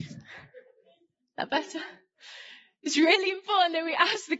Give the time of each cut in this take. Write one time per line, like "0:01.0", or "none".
none